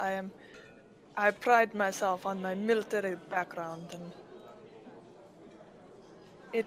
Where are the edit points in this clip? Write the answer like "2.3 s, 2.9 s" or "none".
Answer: none